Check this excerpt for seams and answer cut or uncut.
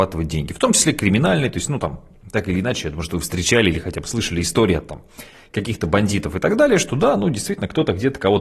uncut